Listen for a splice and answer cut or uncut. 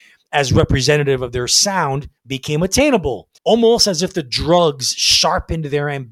cut